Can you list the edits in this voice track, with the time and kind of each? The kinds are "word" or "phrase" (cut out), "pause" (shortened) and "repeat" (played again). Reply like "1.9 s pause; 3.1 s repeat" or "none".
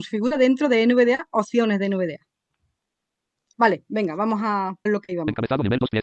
3.5 s pause; 4.9 s word

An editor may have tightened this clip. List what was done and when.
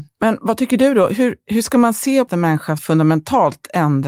2.3 s phrase; 2.8 s word

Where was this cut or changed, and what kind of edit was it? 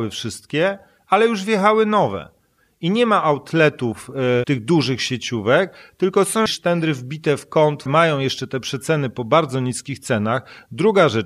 4.4 s word; 6.5 s word; 7.9 s word

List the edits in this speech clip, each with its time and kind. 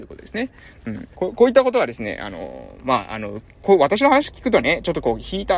1.1 s pause; 3.6 s word

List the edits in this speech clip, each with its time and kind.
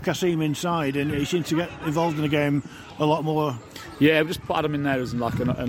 4.4 s word

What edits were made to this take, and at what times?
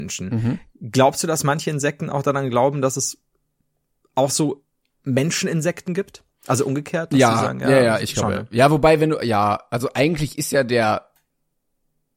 none

